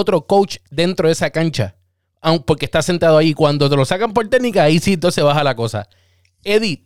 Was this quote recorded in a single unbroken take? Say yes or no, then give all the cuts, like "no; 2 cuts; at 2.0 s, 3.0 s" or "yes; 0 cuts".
yes; 0 cuts